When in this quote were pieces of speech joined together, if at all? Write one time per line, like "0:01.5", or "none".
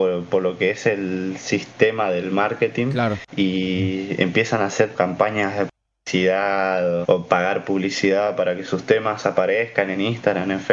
0:03.3
0:04.9
0:07.0